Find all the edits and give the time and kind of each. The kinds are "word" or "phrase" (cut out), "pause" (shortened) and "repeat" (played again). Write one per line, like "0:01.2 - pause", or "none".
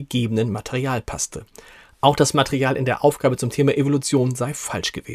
none